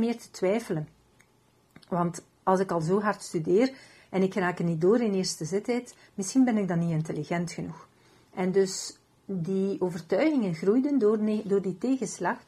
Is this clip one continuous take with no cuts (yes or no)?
no